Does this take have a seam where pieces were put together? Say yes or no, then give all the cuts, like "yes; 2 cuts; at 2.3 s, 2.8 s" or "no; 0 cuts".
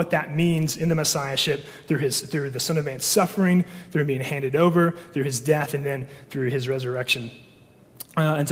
no; 0 cuts